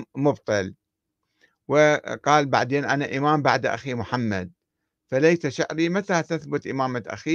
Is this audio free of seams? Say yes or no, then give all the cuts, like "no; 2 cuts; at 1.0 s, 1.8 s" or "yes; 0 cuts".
yes; 0 cuts